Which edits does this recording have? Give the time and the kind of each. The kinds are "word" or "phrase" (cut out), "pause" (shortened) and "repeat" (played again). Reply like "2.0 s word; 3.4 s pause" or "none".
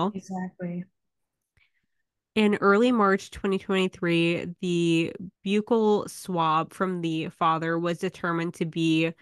5.4 s pause